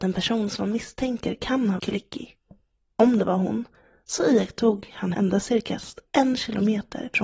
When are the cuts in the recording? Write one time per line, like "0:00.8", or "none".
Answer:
0:01.8
0:05.1